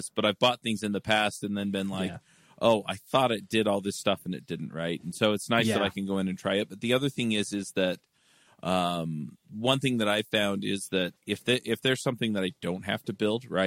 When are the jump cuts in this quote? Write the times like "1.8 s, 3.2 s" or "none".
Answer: 11.2 s